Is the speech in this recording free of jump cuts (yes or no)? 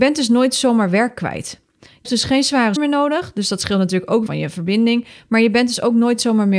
no